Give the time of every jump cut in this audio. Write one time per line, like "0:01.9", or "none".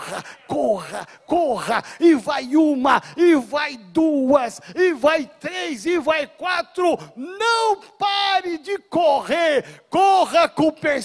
none